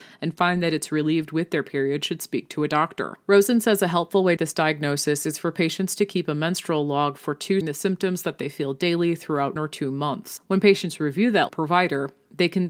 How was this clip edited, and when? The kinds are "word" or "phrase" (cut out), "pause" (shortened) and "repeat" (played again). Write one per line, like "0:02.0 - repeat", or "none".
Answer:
0:04.4 - phrase
0:07.6 - phrase
0:09.6 - word
0:11.5 - phrase